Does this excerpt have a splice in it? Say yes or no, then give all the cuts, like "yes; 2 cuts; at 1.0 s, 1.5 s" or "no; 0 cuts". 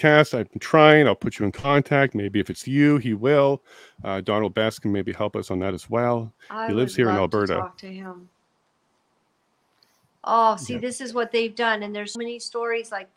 yes; 1 cut; at 12.1 s